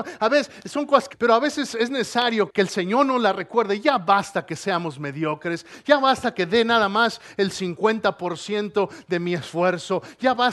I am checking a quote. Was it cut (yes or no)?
yes